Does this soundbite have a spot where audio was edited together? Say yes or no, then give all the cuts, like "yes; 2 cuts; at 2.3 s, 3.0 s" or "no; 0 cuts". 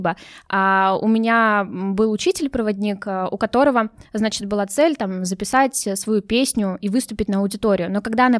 no; 0 cuts